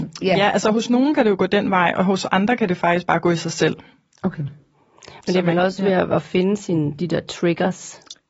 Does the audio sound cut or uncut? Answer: uncut